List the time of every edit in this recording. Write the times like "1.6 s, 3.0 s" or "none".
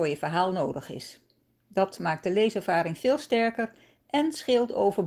none